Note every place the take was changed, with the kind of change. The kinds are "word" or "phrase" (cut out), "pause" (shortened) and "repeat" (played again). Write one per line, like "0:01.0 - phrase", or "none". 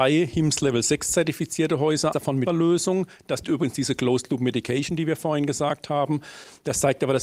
0:02.1 - word
0:02.5 - word
0:03.4 - word